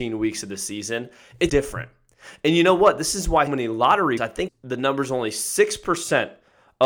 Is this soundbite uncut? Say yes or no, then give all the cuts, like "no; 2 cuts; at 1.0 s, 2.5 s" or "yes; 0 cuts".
no; 4 cuts; at 1.5 s, 3.5 s, 4.2 s, 4.5 s